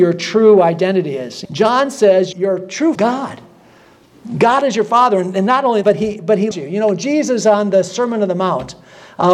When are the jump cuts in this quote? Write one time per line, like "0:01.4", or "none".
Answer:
0:01.4
0:02.3
0:03.0
0:05.8
0:06.5